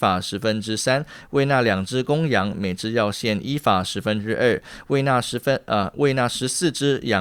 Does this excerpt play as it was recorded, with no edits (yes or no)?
yes